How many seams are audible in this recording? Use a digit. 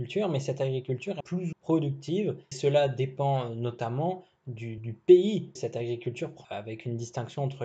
6